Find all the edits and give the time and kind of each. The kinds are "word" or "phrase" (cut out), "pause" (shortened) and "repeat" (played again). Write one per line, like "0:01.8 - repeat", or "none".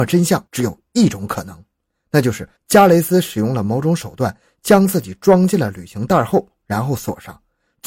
0:02.6 - pause

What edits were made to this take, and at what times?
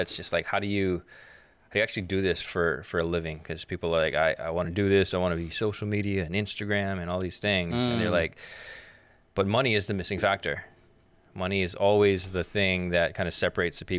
none

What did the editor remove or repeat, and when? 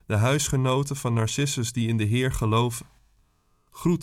none

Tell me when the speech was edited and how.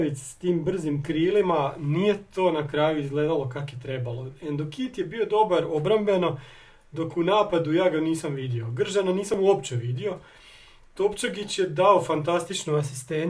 none

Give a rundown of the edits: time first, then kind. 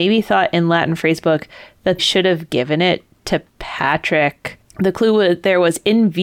0:02.0 - word
0:03.5 - pause

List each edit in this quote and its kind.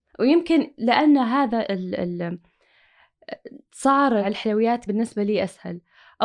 0:04.2 - word
0:04.9 - word

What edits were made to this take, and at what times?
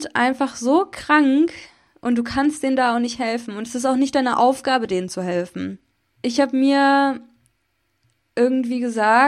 none

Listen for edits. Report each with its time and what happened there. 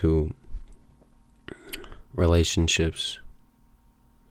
0:02.0 - pause

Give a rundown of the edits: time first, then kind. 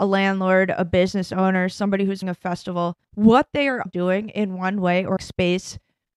0:02.2 - word
0:03.0 - pause
0:03.9 - word
0:05.2 - phrase

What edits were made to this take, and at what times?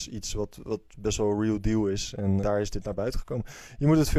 0:02.4 - word

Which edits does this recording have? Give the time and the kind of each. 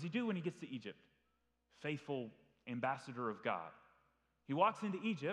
none

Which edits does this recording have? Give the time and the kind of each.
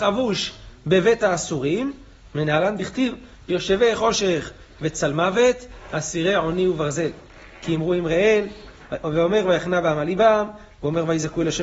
none

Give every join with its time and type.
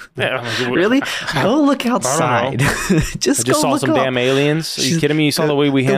none

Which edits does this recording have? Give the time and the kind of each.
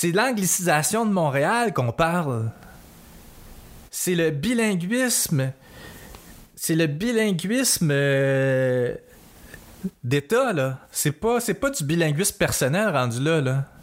0:03.9 - pause
0:10.8 - pause

